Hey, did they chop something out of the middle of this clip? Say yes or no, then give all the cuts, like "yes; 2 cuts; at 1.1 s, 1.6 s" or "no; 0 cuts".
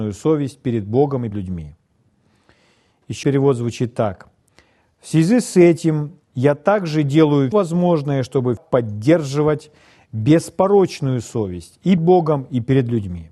yes; 5 cuts; at 1.3 s, 3.2 s, 7.5 s, 8.6 s, 12.0 s